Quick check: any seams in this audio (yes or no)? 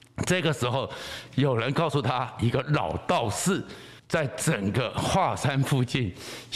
yes